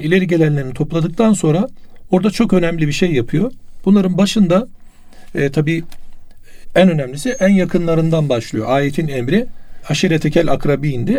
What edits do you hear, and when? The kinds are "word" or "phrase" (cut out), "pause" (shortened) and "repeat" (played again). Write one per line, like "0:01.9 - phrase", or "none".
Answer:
none